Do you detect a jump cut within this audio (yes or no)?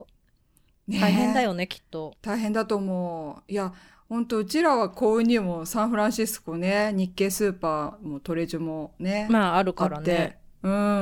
no